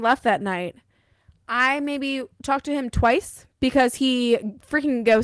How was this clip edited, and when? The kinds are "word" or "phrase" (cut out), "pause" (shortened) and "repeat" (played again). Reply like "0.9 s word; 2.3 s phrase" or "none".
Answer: none